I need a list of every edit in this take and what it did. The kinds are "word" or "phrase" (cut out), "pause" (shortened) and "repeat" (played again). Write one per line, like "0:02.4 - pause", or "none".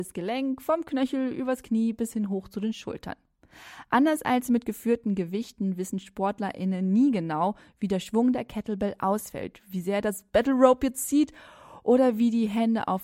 none